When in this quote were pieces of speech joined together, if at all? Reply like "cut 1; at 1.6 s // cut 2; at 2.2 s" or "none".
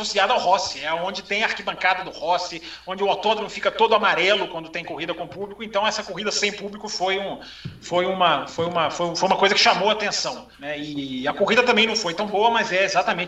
cut 1; at 10.5 s